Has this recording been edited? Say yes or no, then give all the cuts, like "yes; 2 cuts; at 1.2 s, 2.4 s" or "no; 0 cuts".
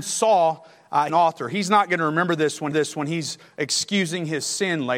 yes; 2 cuts; at 1.1 s, 2.7 s